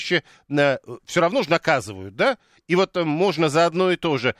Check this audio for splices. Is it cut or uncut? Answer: uncut